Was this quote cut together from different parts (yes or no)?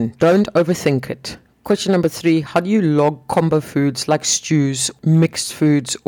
yes